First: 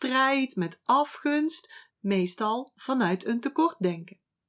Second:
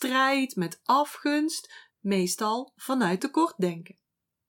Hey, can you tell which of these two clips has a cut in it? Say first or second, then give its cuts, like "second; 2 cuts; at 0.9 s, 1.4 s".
second; 1 cut; at 3.2 s